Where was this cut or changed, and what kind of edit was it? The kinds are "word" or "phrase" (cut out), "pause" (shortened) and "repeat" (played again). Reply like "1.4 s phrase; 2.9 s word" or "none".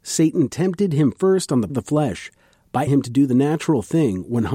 1.7 s word; 2.9 s word